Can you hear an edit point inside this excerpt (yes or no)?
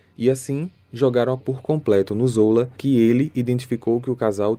yes